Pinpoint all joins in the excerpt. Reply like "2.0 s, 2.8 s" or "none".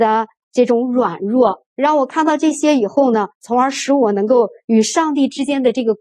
1.7 s, 3.3 s